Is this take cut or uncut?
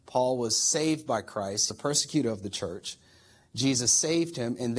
cut